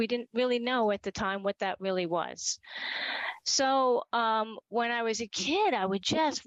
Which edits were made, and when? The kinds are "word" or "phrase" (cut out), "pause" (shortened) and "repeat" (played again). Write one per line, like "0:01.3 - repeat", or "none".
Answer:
none